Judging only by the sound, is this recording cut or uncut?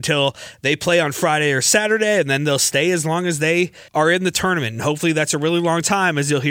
cut